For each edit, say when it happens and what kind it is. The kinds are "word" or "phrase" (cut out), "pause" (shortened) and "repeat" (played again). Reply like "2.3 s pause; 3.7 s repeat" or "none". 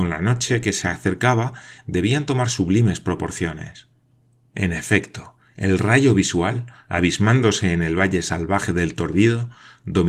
none